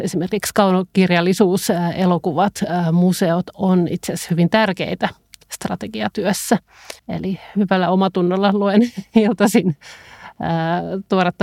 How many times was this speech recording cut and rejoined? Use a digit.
1